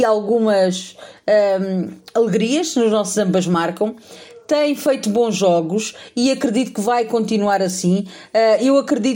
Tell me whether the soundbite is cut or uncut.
uncut